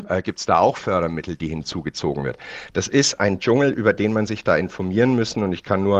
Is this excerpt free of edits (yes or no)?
yes